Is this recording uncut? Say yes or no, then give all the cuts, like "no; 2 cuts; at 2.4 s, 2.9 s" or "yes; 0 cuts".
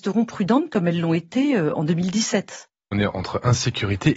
no; 1 cut; at 2.9 s